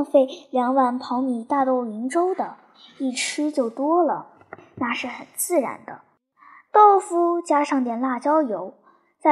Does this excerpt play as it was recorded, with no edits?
yes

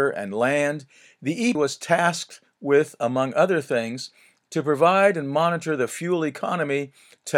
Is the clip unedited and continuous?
no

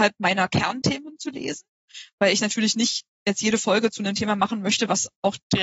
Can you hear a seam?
no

